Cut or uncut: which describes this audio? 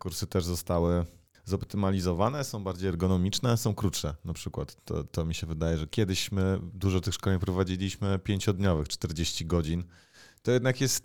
uncut